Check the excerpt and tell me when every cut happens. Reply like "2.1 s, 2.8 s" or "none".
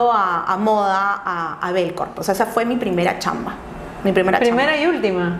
none